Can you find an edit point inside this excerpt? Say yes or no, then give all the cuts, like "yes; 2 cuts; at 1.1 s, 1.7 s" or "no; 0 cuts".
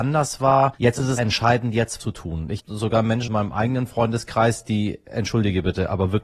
yes; 4 cuts; at 1.2 s, 2.0 s, 2.6 s, 3.3 s